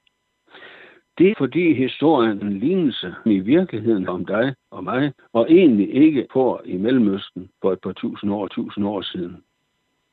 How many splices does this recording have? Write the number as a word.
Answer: eight